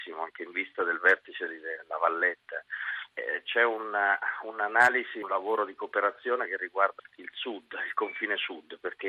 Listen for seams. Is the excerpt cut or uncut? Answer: cut